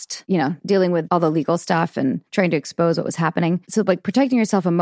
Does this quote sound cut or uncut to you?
cut